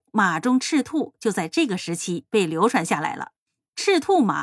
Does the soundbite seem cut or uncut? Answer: uncut